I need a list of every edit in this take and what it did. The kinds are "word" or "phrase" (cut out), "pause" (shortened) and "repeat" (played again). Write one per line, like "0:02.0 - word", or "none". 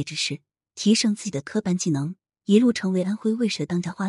none